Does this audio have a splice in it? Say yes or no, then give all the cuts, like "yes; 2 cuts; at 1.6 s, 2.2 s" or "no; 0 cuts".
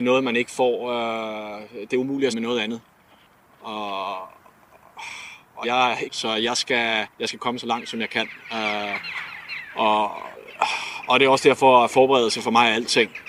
yes; 4 cuts; at 2.3 s, 5.6 s, 6.1 s, 7.1 s